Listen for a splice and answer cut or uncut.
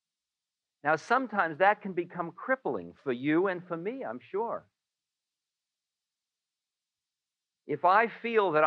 uncut